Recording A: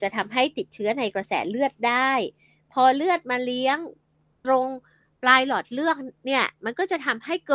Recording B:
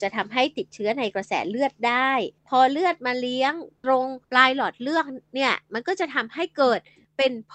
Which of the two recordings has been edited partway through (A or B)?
B